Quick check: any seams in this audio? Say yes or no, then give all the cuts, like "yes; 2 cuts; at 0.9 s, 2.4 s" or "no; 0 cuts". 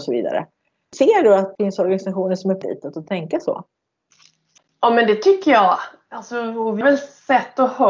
yes; 2 cuts; at 2.6 s, 6.8 s